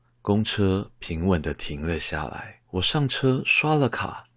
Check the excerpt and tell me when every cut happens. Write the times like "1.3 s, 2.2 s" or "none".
2.6 s